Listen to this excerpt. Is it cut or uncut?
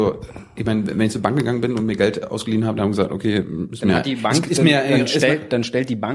uncut